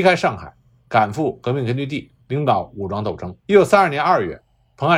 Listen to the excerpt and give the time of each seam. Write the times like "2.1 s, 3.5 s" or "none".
2.2 s, 3.4 s